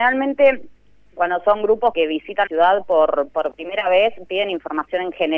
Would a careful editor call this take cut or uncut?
cut